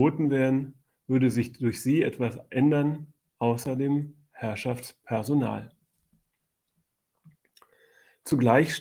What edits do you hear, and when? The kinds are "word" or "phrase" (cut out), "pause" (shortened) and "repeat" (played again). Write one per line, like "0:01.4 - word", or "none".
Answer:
none